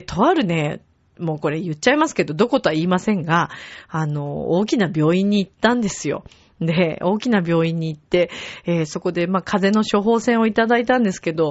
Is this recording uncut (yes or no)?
yes